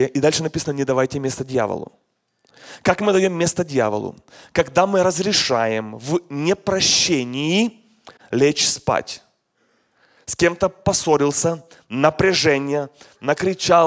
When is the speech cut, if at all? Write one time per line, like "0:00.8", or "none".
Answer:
none